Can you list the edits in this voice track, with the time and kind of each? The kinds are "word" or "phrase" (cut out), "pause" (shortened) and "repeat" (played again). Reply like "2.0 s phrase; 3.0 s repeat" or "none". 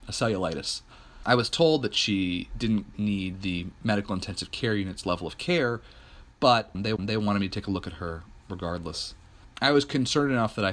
2.9 s word; 7.0 s repeat

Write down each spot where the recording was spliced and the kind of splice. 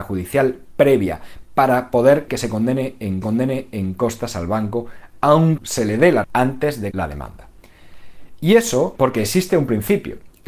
2.3 s word; 3.2 s repeat; 5.6 s phrase; 6.2 s word; 6.9 s word; 9.0 s word

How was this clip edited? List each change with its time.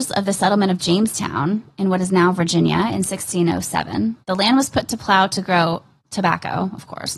4.2 s pause

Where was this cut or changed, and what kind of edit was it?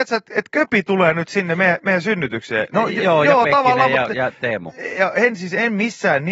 none

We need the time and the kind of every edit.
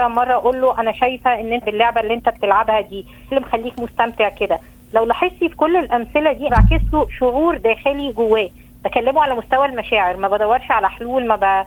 1.6 s word; 3.3 s word; 6.5 s word

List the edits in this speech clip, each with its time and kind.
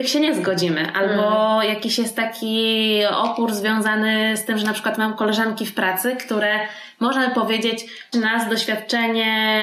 8.1 s word

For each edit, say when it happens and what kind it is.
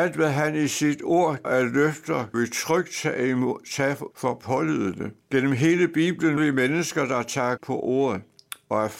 1.4 s word; 2.3 s word; 4.1 s word; 5.2 s pause; 6.4 s word; 7.6 s word

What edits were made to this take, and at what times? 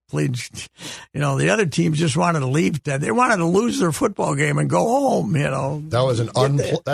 none

